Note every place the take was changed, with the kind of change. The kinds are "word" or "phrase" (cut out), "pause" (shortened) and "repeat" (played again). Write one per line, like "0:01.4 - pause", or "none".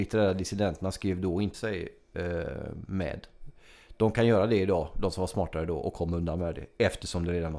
0:01.5 - word